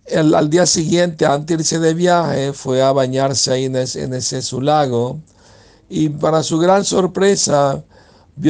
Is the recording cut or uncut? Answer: uncut